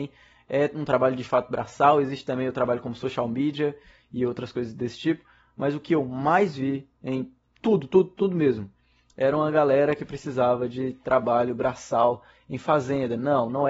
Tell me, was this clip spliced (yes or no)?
no